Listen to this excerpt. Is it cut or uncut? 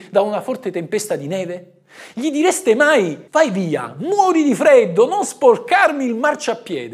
cut